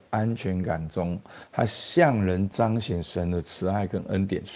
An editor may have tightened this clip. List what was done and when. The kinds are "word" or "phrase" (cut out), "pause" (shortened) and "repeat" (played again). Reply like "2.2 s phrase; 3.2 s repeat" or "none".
none